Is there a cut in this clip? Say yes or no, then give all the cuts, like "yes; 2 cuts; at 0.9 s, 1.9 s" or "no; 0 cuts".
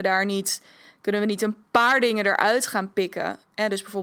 no; 0 cuts